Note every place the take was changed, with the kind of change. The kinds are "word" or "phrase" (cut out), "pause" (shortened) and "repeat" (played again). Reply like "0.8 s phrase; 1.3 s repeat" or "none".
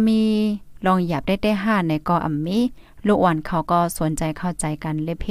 none